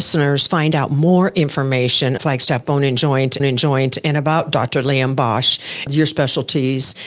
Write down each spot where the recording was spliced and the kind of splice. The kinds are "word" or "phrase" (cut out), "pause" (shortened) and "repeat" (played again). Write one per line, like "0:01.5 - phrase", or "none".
0:02.2 - word
0:03.4 - repeat
0:05.9 - phrase